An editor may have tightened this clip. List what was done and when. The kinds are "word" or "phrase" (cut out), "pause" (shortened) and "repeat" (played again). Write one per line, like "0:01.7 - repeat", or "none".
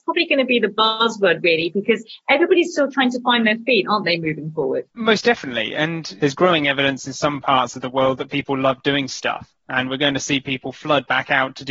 0:04.9 - pause